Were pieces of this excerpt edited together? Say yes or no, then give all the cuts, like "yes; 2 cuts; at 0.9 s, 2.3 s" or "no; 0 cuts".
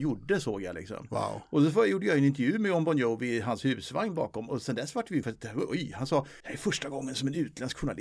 yes; 2 cuts; at 5.2 s, 6.4 s